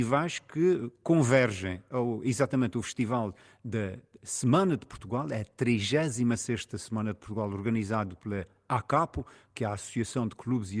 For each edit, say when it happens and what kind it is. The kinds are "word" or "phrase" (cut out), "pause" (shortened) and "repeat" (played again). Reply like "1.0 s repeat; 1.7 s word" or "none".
none